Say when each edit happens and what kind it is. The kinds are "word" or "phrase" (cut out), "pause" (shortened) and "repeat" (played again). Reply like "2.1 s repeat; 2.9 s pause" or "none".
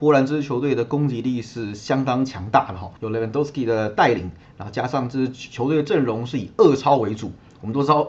3.0 s pause